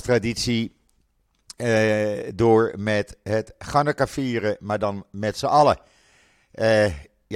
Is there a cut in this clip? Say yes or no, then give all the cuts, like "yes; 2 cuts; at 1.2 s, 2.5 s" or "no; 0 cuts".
no; 0 cuts